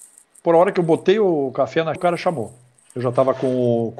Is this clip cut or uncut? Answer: cut